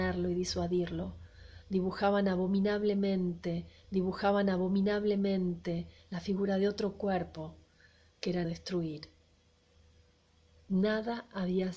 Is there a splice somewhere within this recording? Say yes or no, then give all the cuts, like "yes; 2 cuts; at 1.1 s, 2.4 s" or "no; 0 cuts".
yes; 2 cuts; at 3.8 s, 8.4 s